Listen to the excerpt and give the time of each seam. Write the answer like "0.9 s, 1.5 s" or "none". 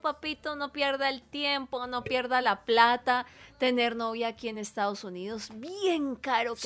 none

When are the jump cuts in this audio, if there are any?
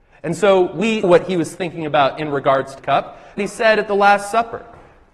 1.0 s, 2.8 s, 3.4 s

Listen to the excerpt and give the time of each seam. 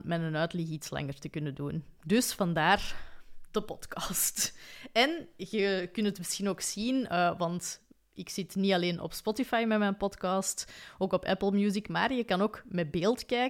none

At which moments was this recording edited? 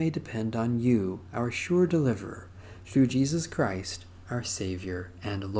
none

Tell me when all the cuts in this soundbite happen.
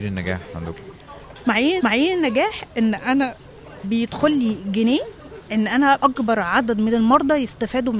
1.8 s, 3.8 s, 6.0 s

